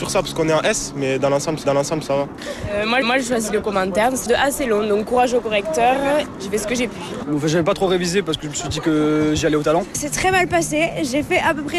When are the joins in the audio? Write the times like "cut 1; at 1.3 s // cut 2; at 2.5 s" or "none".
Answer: cut 1; at 1.6 s // cut 2; at 3.0 s // cut 3; at 4.3 s